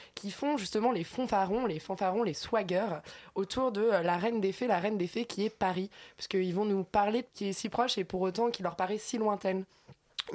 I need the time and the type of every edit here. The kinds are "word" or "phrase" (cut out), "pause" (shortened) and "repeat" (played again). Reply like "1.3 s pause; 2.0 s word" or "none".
7.3 s phrase